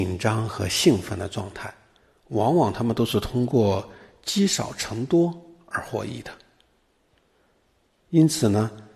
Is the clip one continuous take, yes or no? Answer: yes